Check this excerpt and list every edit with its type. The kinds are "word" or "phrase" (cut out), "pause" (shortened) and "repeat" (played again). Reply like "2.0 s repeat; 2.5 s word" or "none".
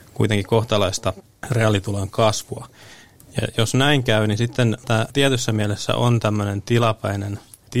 none